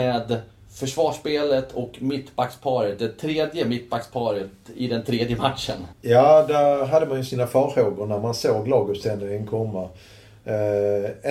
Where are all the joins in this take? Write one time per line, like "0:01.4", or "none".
0:05.9